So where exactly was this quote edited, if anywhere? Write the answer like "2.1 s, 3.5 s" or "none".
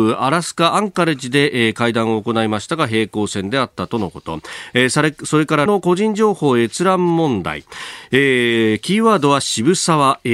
5.7 s